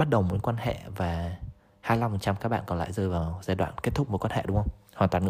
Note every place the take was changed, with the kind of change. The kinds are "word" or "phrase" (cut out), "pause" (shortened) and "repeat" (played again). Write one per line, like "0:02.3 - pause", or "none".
none